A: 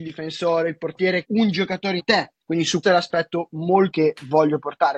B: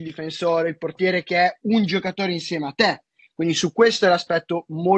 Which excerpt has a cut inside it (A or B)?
A